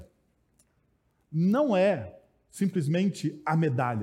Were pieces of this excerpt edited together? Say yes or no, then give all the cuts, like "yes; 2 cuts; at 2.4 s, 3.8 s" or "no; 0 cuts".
no; 0 cuts